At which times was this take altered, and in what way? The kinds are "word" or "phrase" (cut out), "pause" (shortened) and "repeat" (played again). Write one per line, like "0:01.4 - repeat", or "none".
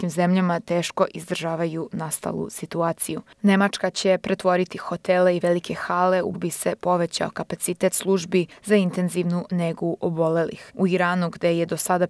0:06.3 - phrase